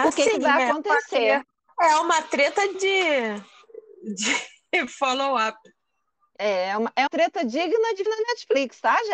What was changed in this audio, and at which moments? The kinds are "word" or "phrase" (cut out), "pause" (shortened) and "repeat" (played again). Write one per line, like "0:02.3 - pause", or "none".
0:02.7 - word
0:07.1 - word
0:08.1 - word